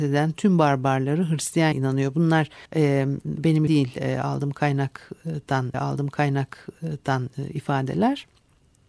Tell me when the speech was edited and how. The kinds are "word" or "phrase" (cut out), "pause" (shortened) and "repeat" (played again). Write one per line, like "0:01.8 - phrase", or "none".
0:01.7 - word
0:02.7 - pause
0:03.7 - word
0:05.7 - repeat